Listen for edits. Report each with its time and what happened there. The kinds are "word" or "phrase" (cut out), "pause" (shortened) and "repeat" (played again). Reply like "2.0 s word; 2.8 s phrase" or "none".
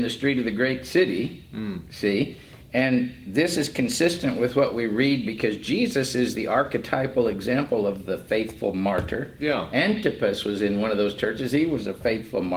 none